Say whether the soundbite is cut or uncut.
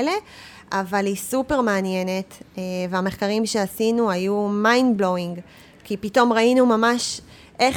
uncut